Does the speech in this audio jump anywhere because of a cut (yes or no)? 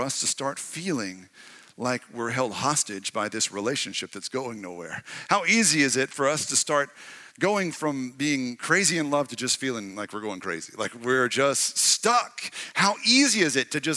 no